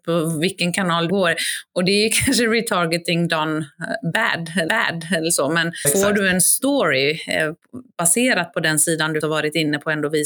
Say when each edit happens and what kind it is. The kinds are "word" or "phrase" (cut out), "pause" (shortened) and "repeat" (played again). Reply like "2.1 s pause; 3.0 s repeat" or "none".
1.1 s word; 4.7 s repeat; 5.8 s word; 9.2 s word